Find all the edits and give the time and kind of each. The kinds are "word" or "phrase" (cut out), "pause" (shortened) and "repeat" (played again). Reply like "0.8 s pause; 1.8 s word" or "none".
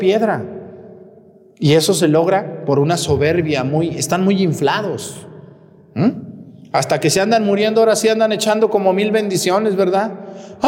none